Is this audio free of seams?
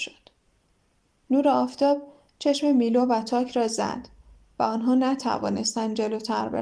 yes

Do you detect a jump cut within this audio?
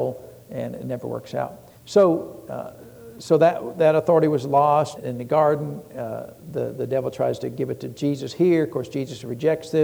yes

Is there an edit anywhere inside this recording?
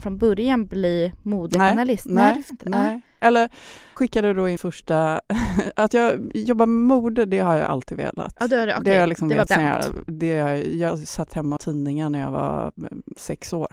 yes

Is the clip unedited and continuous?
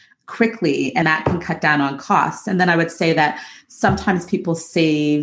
no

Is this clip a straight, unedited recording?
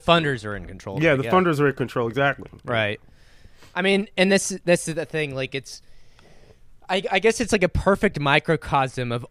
yes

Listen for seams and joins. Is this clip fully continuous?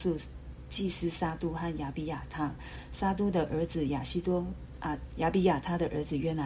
no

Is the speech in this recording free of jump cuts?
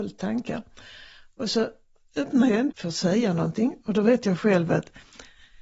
no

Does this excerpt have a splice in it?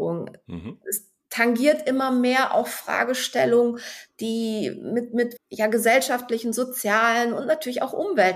yes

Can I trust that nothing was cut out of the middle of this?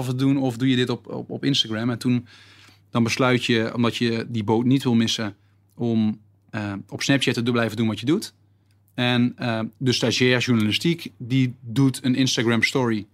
yes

